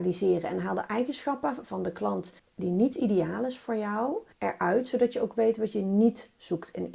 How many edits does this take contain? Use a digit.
2